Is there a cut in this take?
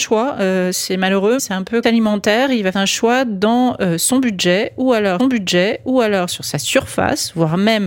yes; 4 cuts; at 1.4 s, 1.8 s, 2.7 s, 5.2 s

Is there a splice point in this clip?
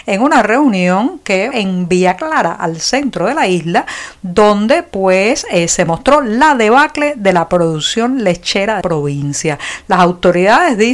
yes; 2 cuts; at 1.5 s, 8.8 s

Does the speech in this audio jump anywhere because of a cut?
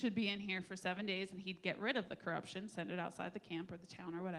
no; 0 cuts

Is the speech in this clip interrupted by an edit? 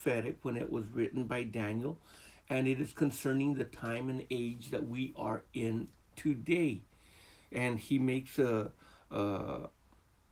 no; 0 cuts

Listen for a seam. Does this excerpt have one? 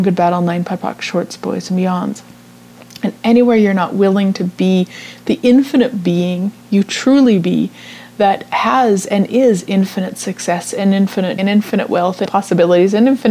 yes; 2 cuts; at 11.4 s, 12.3 s

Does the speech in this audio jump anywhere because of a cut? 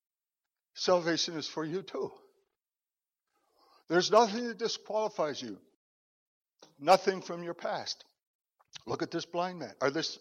no; 0 cuts

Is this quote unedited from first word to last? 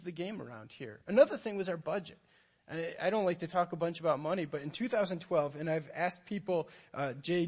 yes; 0 cuts

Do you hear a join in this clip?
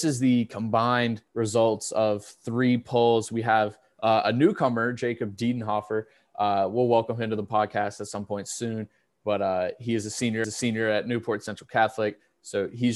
yes; 2 cuts; at 1.3 s, 10.4 s

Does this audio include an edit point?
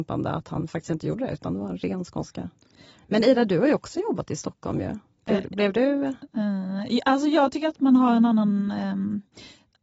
no; 0 cuts

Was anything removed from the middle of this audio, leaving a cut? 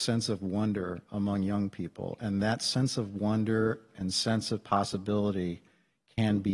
no; 0 cuts

